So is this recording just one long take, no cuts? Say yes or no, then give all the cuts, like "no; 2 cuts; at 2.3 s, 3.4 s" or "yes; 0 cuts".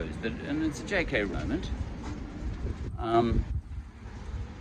no; 1 cut; at 1.3 s